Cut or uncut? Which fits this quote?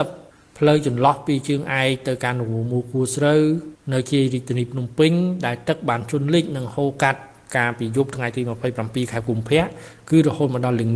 uncut